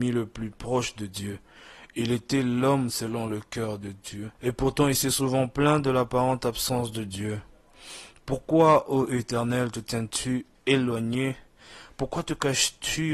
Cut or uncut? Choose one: cut